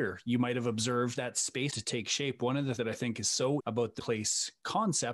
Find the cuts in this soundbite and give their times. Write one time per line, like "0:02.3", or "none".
0:01.1
0:01.7
0:02.8
0:03.6
0:04.0

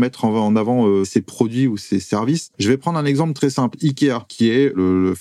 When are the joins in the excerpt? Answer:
0:02.5
0:04.3

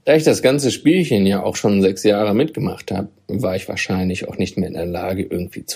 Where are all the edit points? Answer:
none

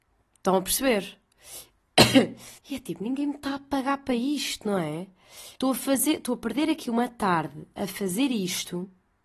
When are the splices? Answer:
0:02.6
0:05.6

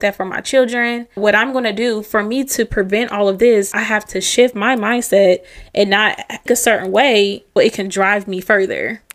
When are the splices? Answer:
0:01.2
0:03.7
0:06.5
0:07.6

